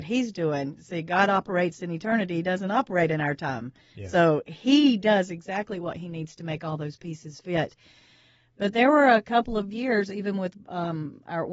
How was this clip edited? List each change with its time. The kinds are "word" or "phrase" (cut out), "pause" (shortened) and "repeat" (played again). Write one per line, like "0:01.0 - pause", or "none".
none